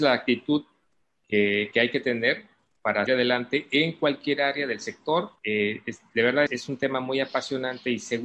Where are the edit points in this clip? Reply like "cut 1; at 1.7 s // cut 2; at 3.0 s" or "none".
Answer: cut 1; at 3.1 s // cut 2; at 5.4 s // cut 3; at 6.5 s